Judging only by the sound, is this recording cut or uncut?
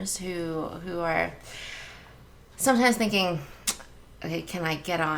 uncut